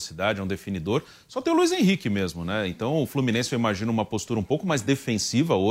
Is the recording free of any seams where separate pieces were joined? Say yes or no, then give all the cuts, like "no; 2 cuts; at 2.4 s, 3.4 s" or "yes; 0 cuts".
yes; 0 cuts